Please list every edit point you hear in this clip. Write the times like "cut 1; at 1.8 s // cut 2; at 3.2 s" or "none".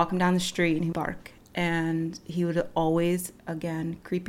cut 1; at 0.9 s // cut 2; at 3.4 s